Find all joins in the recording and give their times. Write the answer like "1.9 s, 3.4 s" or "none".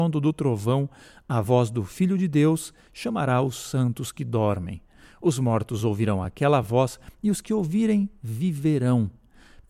none

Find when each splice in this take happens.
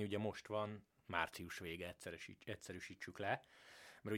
none

